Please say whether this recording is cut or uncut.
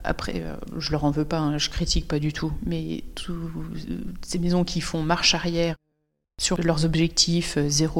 uncut